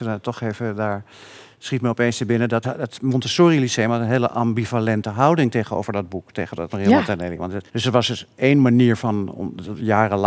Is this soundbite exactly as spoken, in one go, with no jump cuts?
no; 3 cuts; at 2.6 s, 6.7 s, 7.7 s

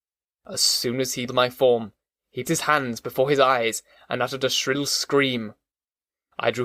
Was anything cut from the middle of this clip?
yes; 2 cuts; at 1.3 s, 2.4 s

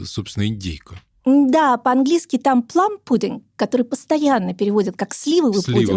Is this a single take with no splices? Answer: yes; 0 cuts

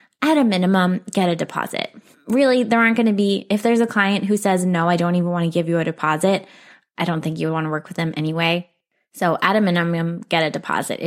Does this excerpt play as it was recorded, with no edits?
yes; 0 cuts

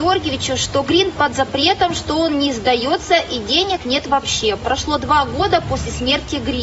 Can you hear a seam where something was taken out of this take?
no; 0 cuts

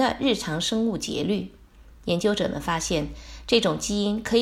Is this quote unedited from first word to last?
yes; 0 cuts

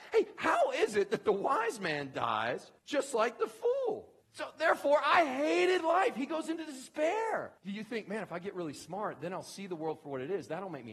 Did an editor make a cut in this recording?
yes; 3 cuts; at 2.8 s, 4.2 s, 7.6 s

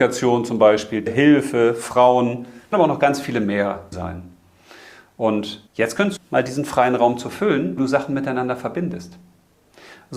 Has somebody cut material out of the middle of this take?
yes; 6 cuts; at 1.1 s, 2.7 s, 3.9 s, 5.7 s, 6.2 s, 7.8 s

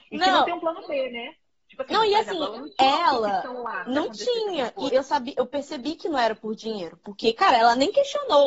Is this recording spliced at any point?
yes; 1 cut; at 4.9 s

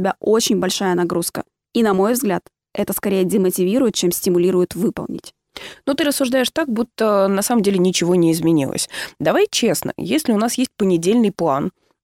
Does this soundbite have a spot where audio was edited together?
no; 0 cuts

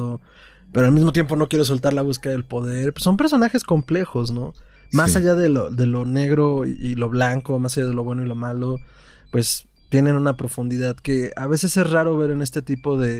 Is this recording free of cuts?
yes; 0 cuts

